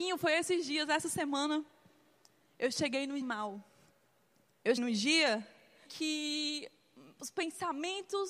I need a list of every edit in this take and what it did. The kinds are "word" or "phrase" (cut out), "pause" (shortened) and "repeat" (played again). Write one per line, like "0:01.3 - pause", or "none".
0:03.2 - word
0:04.8 - word
0:05.9 - word